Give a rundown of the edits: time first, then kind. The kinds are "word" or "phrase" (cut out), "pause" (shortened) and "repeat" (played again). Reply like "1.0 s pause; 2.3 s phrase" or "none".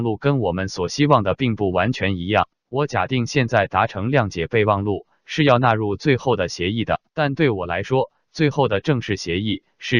2.5 s pause; 7.1 s pause